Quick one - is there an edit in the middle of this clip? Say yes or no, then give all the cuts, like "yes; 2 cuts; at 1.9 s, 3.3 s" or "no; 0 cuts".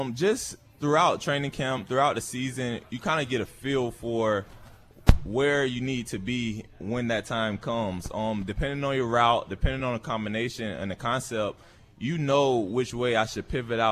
no; 0 cuts